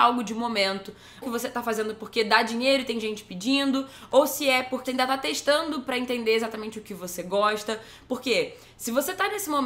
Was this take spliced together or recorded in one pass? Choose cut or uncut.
cut